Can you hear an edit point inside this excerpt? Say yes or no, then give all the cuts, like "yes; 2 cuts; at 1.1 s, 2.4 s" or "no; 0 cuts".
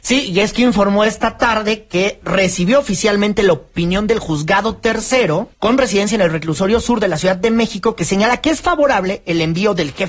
yes; 1 cut; at 5.5 s